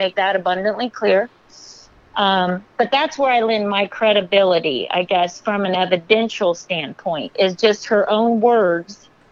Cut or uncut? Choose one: cut